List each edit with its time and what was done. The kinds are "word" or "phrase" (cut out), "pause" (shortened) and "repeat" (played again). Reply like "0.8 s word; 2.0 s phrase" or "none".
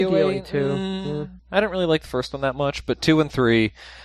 1.4 s pause